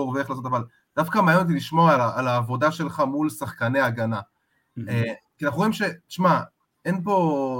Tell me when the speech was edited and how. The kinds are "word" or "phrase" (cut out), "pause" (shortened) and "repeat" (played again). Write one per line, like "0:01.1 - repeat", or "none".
none